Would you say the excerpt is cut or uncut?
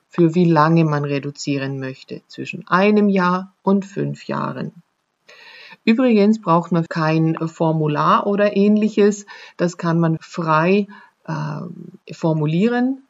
cut